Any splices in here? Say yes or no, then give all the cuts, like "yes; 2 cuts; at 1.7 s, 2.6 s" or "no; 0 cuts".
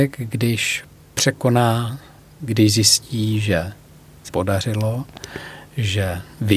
yes; 2 cuts; at 2.4 s, 4.3 s